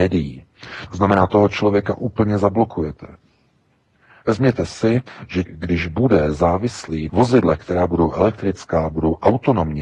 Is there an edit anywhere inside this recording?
yes; 2 cuts; at 5.5 s, 7.1 s

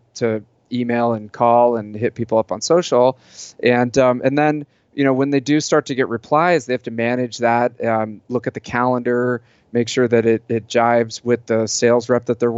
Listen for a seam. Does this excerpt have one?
no; 0 cuts

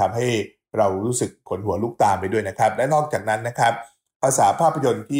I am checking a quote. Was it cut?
no; 0 cuts

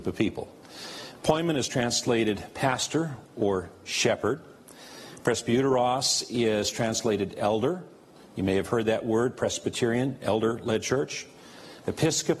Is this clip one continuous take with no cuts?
yes; 0 cuts

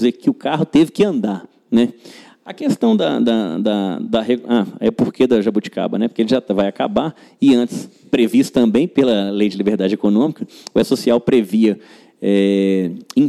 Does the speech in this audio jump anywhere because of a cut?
no; 0 cuts

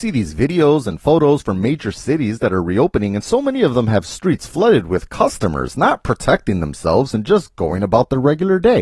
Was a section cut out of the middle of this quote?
no; 0 cuts

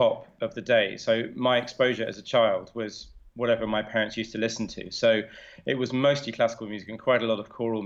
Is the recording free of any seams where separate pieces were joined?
yes; 0 cuts

